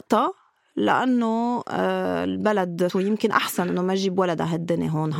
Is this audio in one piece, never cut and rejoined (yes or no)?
no